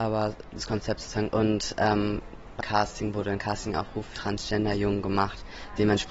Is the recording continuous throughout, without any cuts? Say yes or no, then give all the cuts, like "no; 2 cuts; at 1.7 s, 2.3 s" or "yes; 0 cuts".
no; 4 cuts; at 1.3 s, 2.6 s, 3.4 s, 4.2 s